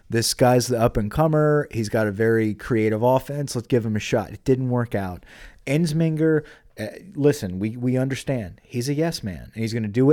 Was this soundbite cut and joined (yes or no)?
no